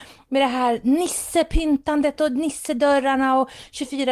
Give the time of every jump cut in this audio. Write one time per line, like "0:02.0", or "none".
none